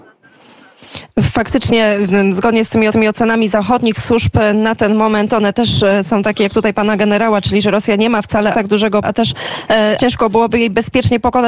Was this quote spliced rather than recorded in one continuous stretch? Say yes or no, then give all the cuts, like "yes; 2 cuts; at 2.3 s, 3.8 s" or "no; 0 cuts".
yes; 4 cuts; at 2.9 s, 8.5 s, 9.0 s, 10.0 s